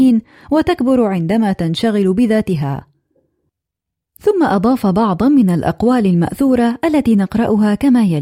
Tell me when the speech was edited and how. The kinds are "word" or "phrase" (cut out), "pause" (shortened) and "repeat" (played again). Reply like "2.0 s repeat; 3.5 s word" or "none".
none